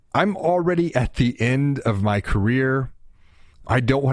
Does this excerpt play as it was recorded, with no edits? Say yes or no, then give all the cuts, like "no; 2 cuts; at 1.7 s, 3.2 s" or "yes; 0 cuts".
yes; 0 cuts